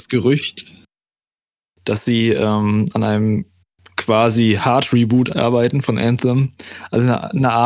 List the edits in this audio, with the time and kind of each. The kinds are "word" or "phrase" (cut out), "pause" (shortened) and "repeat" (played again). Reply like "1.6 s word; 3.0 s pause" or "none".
none